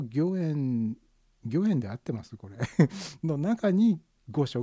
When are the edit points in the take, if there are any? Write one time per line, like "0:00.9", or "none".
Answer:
none